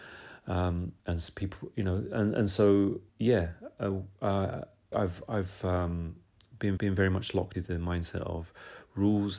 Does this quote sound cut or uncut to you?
cut